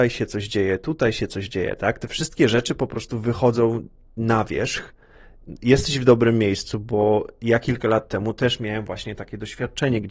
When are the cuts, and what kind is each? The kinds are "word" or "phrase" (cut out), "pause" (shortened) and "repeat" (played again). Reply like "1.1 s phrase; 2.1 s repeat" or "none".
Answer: none